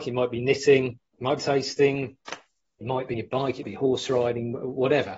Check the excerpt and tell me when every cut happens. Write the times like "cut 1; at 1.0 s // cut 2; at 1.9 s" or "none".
cut 1; at 1.1 s // cut 2; at 1.4 s // cut 3; at 2.8 s // cut 4; at 3.1 s // cut 5; at 3.6 s